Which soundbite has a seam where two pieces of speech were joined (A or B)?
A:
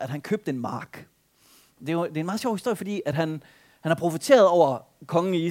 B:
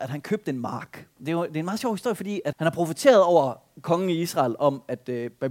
B